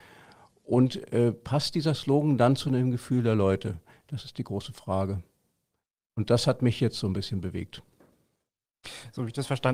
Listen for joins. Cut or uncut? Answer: uncut